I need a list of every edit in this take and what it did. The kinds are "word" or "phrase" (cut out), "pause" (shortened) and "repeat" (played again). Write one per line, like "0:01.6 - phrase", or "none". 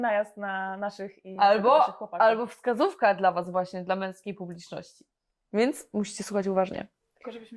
none